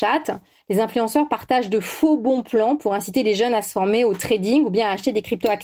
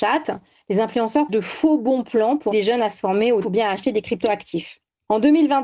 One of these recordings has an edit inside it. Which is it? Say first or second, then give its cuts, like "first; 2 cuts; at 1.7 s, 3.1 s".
second; 3 cuts; at 1.3 s, 2.5 s, 3.4 s